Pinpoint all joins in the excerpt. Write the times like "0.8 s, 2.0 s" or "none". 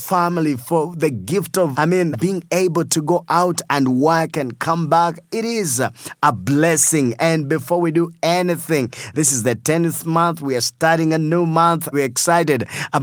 1.7 s, 2.1 s, 11.9 s